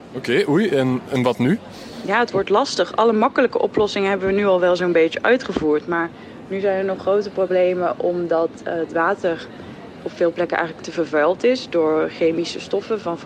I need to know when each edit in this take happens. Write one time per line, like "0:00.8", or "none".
none